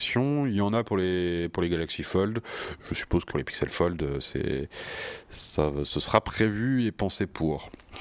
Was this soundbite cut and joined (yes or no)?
yes